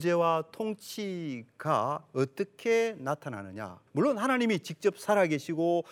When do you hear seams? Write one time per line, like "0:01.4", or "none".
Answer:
0:03.9